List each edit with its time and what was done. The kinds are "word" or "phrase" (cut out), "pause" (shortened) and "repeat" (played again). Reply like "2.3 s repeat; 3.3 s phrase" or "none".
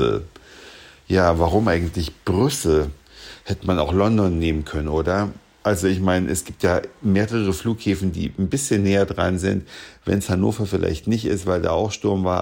none